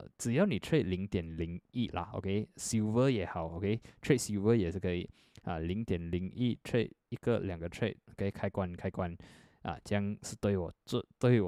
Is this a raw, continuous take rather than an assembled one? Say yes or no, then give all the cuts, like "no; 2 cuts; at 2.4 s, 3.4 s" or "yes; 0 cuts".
yes; 0 cuts